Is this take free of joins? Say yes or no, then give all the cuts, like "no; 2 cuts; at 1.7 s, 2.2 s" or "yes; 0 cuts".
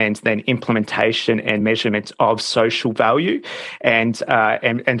yes; 0 cuts